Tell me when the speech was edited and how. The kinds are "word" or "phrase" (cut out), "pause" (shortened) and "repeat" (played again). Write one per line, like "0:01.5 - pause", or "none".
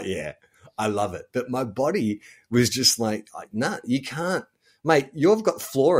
none